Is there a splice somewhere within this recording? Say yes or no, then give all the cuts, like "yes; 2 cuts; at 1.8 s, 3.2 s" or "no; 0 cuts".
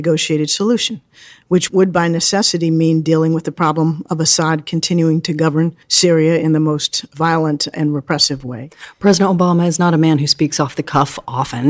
yes; 1 cut; at 5.8 s